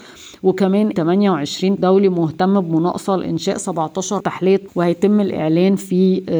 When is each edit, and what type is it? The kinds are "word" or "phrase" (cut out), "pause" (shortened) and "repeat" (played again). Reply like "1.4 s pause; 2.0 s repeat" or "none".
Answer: 0.9 s phrase; 1.8 s word; 4.2 s word; 4.7 s word

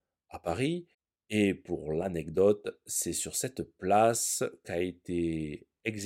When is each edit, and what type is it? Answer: none

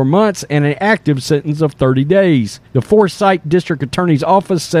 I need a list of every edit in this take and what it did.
2.7 s pause; 3.4 s word

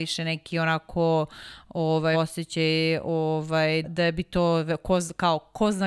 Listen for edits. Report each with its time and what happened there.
2.1 s word; 3.8 s word

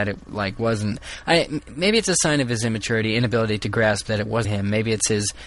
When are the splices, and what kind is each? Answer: 4.4 s word

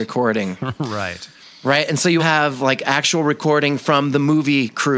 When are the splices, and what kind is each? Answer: 1.4 s pause; 2.2 s word

